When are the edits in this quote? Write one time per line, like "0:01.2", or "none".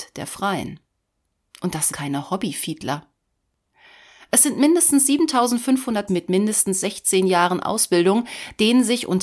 0:01.9
0:06.1